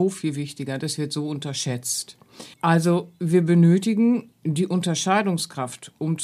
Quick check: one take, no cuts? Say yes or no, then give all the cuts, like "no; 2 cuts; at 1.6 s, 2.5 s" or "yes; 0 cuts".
no; 2 cuts; at 2.5 s, 4.3 s